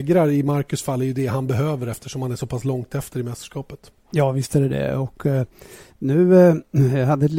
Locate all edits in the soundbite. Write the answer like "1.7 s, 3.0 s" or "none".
none